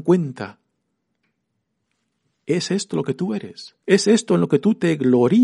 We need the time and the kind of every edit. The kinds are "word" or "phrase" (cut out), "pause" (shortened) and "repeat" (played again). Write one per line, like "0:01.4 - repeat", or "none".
0:03.8 - pause